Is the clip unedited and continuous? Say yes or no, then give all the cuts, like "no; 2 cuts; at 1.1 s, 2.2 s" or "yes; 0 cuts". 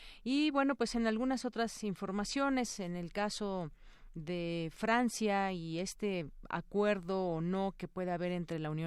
yes; 0 cuts